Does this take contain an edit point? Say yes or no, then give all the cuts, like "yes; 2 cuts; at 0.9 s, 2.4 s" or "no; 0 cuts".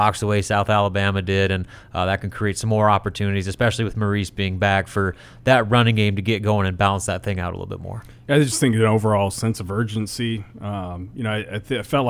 no; 0 cuts